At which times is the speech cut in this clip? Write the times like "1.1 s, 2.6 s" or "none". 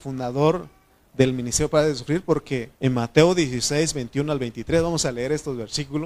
2.7 s